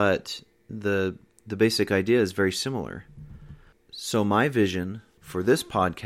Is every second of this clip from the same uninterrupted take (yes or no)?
yes